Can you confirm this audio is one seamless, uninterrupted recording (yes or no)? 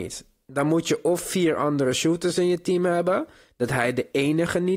yes